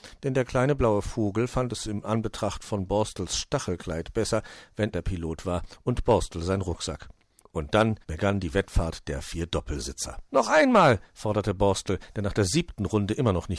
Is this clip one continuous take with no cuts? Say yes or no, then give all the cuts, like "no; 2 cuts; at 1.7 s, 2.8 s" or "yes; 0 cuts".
no; 4 cuts; at 4.9 s, 7.4 s, 8.0 s, 10.3 s